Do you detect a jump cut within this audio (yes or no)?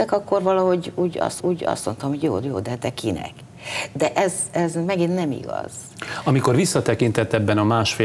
yes